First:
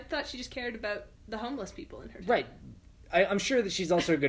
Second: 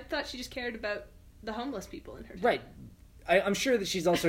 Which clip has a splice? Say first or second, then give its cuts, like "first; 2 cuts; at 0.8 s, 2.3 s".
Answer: first; 1 cut; at 1.1 s